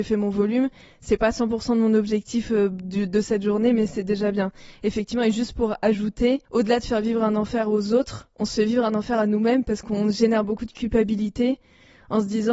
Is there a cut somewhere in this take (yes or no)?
yes